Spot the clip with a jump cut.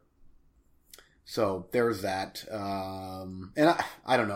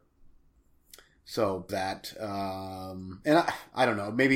second; 1 cut; at 1.7 s

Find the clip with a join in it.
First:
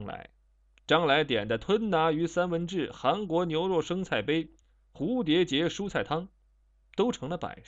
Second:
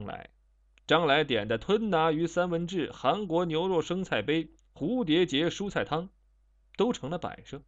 second; 1 cut; at 4.6 s

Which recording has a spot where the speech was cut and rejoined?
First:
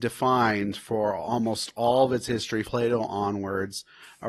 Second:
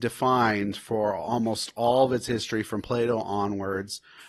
first; 1 cut; at 2.6 s

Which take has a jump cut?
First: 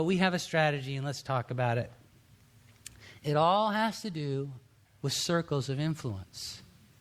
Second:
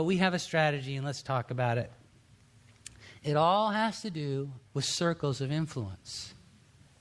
second; 1 cut; at 4.7 s

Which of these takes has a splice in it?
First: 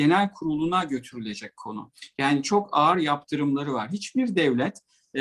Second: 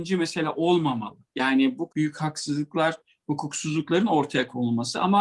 second; 1 cut; at 1.9 s

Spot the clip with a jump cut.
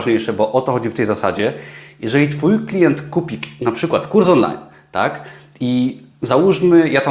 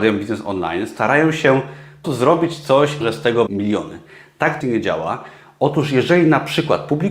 second; 4 cuts; at 2.0 s, 3.0 s, 3.5 s, 4.6 s

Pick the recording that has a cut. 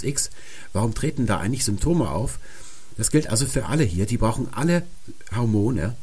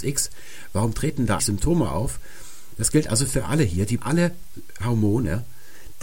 second; 2 cuts; at 1.4 s, 4.0 s

